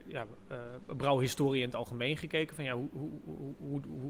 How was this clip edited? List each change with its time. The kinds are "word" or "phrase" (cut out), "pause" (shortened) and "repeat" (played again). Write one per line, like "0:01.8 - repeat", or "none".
none

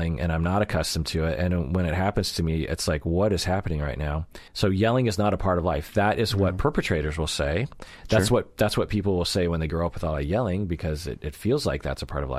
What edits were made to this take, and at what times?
0:04.5 - pause

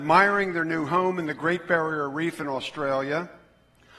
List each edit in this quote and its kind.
none

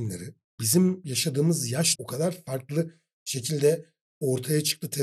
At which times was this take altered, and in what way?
0:02.0 - word

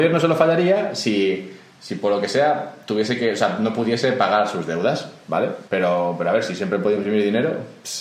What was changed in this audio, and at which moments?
0:05.7 - pause

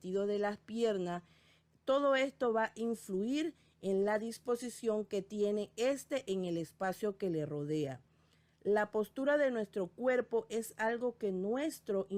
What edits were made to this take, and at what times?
none

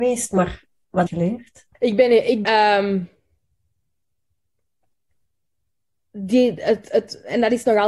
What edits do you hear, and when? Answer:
0:01.1 - phrase
0:01.7 - pause
0:02.4 - word

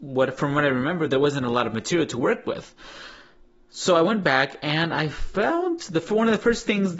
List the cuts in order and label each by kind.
none

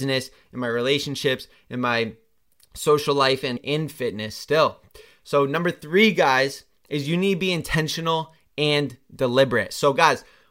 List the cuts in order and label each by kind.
0:03.6 - word

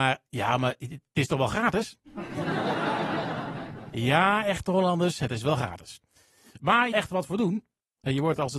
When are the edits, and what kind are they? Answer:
0:02.1 - pause
0:06.9 - phrase

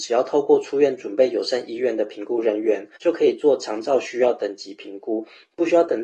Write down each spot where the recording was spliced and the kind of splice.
0:03.0 - pause

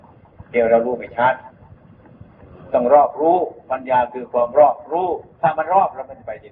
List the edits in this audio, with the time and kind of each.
0:05.3 - pause

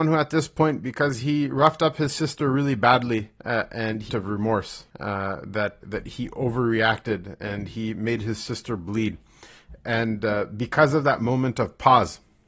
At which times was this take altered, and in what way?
0:03.4 - pause
0:04.1 - phrase
0:04.9 - pause
0:05.8 - word

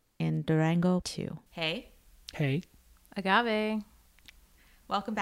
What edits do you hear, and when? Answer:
0:01.0 - word
0:01.5 - pause

